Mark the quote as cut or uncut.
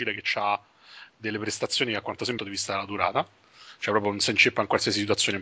cut